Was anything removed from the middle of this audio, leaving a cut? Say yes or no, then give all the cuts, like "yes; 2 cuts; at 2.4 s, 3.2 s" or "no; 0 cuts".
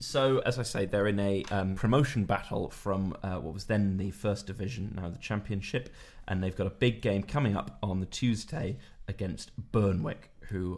no; 0 cuts